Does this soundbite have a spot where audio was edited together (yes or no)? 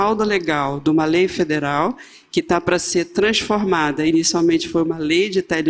no